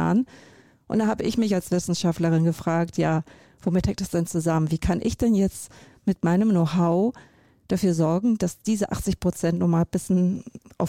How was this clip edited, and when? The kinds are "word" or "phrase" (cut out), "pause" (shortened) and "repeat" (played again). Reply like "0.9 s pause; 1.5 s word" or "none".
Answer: none

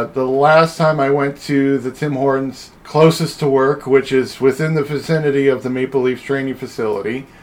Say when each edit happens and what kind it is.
2.8 s pause

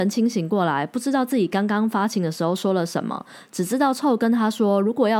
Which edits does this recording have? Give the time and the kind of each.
none

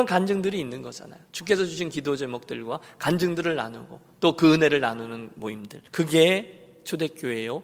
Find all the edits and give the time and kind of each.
1.2 s pause; 5.9 s pause

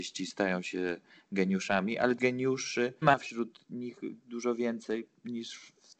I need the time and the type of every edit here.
2.2 s word; 3.0 s word

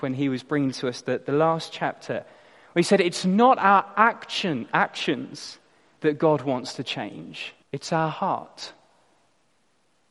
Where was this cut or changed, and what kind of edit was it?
7.6 s pause

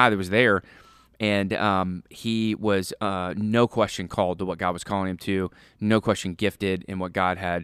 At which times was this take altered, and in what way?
none

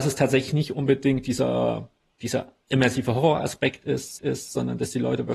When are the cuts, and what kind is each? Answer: 4.2 s repeat

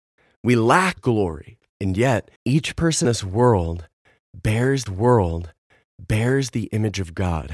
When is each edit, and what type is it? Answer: 1.0 s word; 2.4 s pause; 3.0 s word; 4.9 s repeat

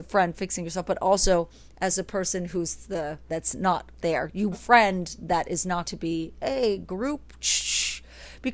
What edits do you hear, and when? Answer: 3.3 s word; 4.0 s pause; 4.5 s word; 5.8 s word

